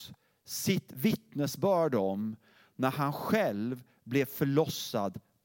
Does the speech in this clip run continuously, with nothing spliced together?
yes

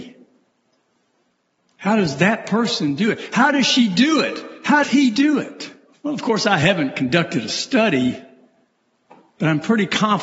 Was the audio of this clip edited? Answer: yes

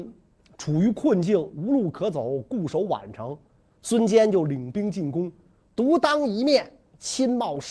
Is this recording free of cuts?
yes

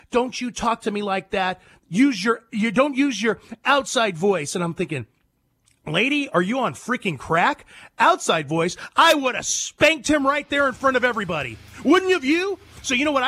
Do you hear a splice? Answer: no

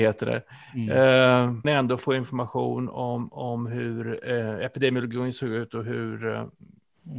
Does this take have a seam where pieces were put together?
yes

